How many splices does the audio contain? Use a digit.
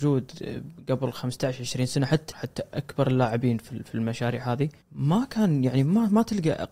3